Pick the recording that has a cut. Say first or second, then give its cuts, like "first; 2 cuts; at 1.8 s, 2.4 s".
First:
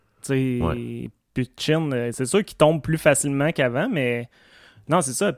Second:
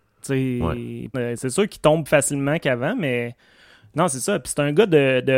second; 2 cuts; at 1.1 s, 2.1 s